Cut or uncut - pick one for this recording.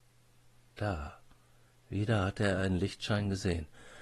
uncut